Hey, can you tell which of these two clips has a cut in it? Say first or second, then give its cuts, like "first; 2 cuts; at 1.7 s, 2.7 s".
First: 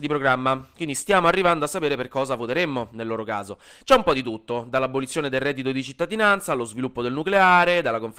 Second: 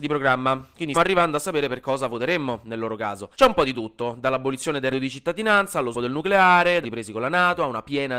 second; 5 cuts; at 0.9 s, 3.3 s, 4.9 s, 5.9 s, 6.8 s